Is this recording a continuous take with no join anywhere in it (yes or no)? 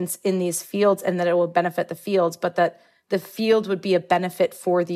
yes